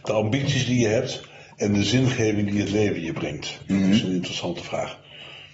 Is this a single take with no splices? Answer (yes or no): yes